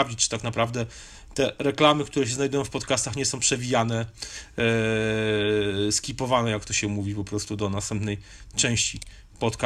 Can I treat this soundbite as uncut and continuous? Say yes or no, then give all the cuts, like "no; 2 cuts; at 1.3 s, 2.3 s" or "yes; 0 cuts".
no; 1 cut; at 3.4 s